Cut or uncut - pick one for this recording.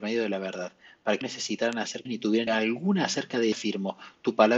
cut